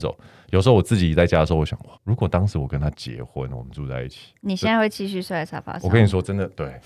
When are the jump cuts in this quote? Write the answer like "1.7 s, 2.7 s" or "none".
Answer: 1.9 s, 4.4 s